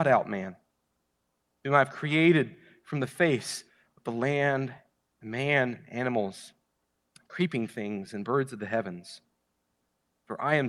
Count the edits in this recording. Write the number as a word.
zero